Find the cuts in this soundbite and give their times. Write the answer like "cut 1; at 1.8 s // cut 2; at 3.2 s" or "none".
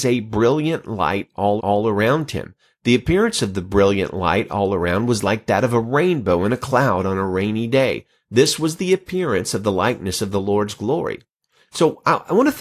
cut 1; at 1.6 s